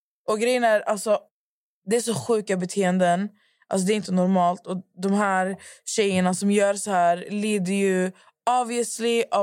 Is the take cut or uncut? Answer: uncut